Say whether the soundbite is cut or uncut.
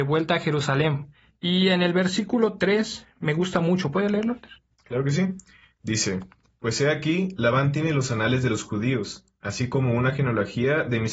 uncut